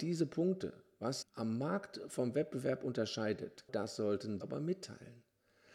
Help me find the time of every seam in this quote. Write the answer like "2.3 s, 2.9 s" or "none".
1.2 s, 3.7 s, 4.4 s